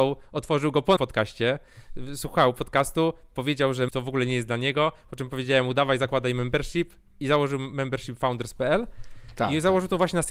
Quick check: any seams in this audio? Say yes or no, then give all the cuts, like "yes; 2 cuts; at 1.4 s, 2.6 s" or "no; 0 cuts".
yes; 2 cuts; at 1.0 s, 3.9 s